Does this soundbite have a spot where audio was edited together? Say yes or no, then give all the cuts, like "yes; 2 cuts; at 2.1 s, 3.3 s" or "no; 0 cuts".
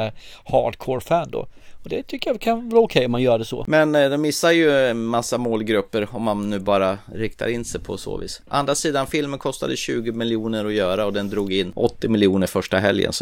no; 0 cuts